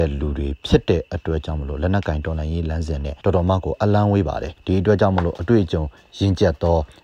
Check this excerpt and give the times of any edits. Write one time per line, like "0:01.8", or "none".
none